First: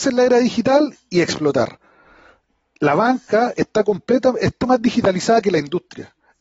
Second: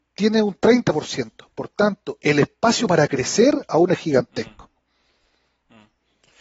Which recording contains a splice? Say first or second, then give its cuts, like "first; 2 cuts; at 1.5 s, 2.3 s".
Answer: first; 1 cut; at 4.6 s